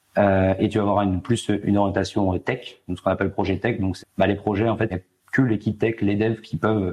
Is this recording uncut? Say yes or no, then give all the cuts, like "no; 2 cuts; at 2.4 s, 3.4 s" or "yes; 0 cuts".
no; 4 cuts; at 1.6 s, 2.9 s, 4.0 s, 4.9 s